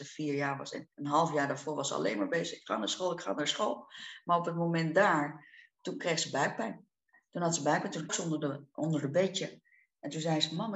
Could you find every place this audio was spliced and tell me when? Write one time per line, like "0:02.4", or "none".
0:00.9
0:08.1